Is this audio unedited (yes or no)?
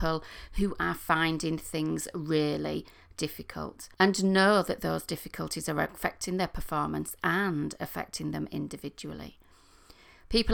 no